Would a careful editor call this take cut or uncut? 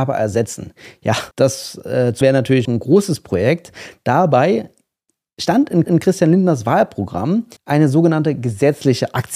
cut